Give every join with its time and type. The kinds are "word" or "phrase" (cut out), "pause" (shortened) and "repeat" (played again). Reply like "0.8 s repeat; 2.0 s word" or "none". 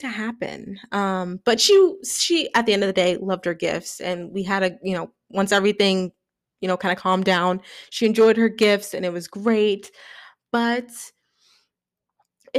none